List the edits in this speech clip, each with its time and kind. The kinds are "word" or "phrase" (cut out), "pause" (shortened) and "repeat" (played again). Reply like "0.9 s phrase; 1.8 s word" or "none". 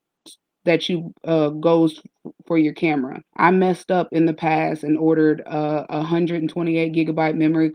3.3 s pause